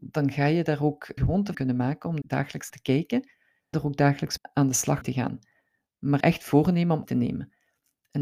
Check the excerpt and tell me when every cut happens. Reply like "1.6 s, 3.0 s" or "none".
1.2 s, 1.5 s, 2.2 s, 2.7 s, 3.7 s, 4.4 s, 5.0 s, 6.2 s, 7.0 s